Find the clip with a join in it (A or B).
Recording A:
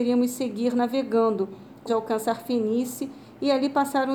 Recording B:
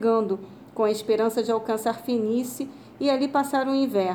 A